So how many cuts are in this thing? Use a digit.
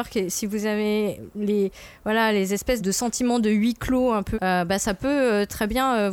2